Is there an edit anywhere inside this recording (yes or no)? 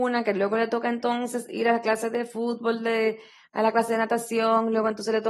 no